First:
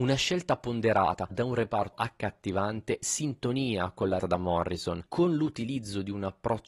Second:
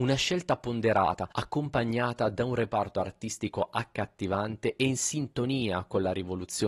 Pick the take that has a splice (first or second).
first